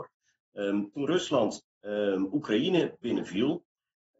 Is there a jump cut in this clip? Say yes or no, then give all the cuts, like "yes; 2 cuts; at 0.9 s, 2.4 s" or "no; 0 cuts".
yes; 1 cut; at 1.7 s